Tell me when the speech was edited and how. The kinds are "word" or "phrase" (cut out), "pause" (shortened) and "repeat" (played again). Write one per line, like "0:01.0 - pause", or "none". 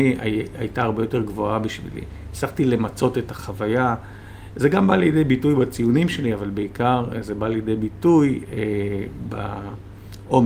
none